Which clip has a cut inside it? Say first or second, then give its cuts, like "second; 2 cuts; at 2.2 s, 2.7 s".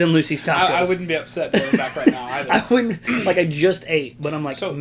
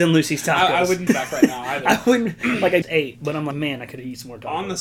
second; 3 cuts; at 1.1 s, 2.8 s, 3.5 s